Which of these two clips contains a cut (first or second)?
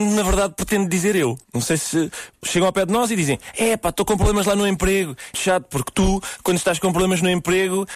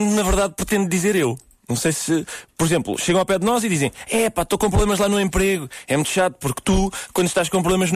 first